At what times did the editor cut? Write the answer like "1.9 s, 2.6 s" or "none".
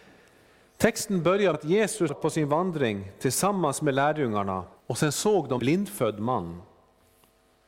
1.5 s, 2.1 s, 4.8 s, 5.6 s